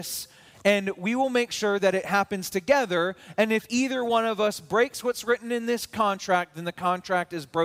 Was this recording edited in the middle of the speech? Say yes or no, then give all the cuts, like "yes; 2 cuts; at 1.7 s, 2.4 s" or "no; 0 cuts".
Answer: no; 0 cuts